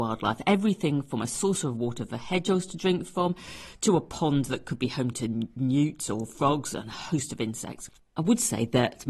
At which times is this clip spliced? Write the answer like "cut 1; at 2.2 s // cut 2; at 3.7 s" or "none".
none